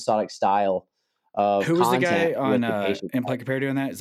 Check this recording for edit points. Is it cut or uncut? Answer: uncut